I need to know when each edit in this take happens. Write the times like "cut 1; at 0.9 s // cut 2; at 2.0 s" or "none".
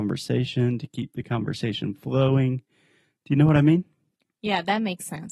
none